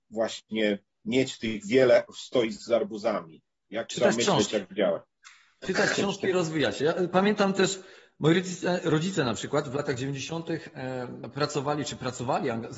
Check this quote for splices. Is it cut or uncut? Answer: uncut